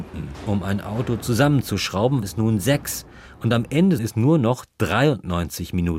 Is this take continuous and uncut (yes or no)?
no